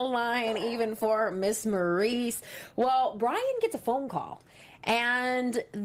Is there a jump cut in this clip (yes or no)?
no